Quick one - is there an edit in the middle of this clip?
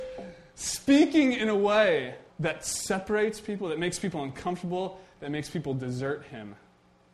yes; 1 cut; at 2.3 s

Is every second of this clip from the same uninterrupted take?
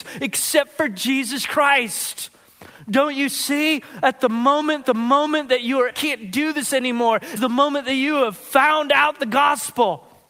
no; 3 cuts; at 4.8 s, 5.9 s, 7.4 s

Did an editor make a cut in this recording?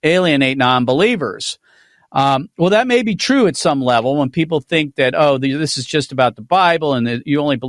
no; 0 cuts

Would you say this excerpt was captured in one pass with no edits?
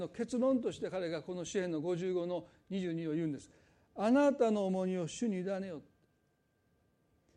yes; 0 cuts

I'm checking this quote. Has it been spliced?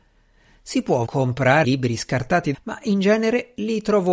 yes; 3 cuts; at 1.1 s, 1.6 s, 2.5 s

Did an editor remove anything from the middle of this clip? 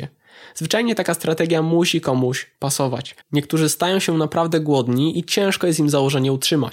yes; 1 cut; at 3.2 s

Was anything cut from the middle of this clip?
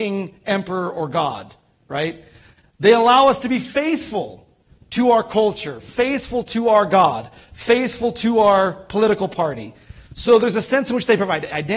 no; 0 cuts

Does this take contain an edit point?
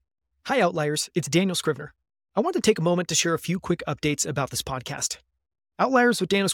no; 0 cuts

